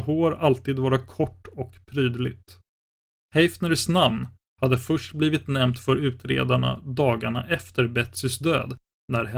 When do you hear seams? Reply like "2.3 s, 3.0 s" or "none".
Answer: none